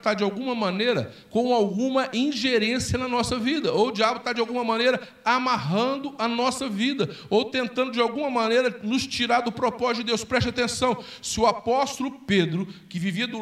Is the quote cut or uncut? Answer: uncut